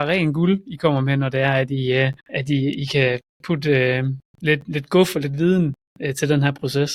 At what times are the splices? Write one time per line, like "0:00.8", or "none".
0:02.2